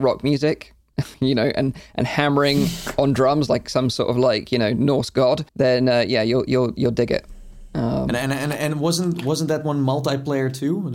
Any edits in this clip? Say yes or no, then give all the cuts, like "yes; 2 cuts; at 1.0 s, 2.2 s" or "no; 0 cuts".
yes; 2 cuts; at 1.1 s, 5.5 s